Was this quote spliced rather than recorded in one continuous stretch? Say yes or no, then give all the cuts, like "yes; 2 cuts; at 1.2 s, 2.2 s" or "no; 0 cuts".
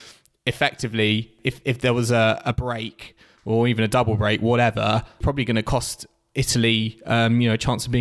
no; 0 cuts